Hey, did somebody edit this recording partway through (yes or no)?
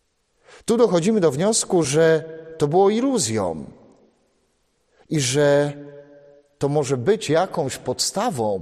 no